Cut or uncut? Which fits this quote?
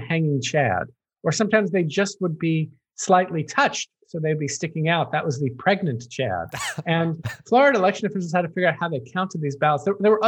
uncut